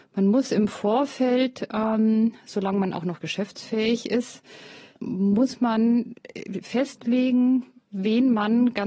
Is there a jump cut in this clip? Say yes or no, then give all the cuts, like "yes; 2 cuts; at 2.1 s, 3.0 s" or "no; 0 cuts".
no; 0 cuts